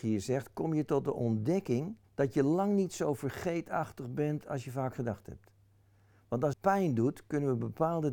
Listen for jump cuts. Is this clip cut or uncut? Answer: cut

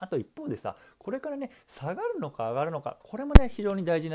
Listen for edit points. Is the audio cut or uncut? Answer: uncut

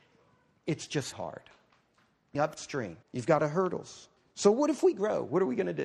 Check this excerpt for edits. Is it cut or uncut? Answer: cut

